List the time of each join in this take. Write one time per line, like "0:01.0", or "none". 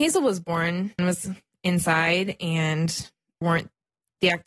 0:01.0
0:03.4